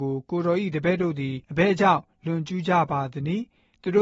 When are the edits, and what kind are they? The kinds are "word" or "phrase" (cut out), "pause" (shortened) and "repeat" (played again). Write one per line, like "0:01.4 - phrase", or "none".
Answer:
0:01.4 - pause